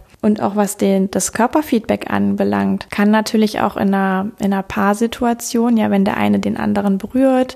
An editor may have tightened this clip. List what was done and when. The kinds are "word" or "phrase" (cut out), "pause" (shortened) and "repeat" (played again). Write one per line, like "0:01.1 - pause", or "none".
none